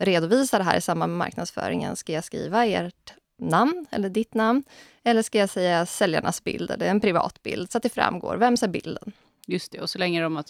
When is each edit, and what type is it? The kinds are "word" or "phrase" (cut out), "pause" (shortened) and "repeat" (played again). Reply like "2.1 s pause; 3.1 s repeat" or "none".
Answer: none